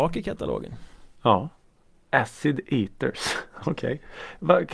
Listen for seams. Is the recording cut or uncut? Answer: cut